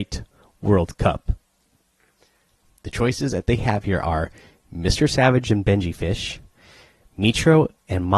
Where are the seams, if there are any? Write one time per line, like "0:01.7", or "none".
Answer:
none